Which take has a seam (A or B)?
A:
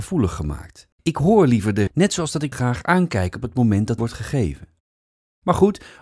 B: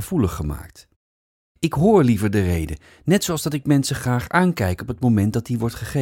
A